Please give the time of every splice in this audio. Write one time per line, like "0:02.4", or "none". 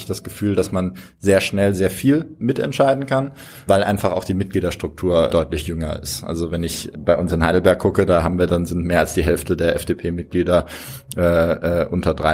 0:02.4
0:03.7
0:05.3
0:06.9
0:08.5